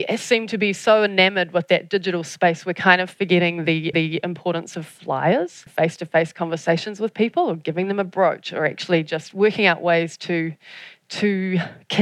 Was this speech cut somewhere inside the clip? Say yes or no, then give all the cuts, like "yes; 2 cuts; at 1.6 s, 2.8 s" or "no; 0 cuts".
yes; 2 cuts; at 3.9 s, 5.7 s